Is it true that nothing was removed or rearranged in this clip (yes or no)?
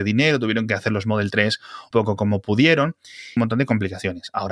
no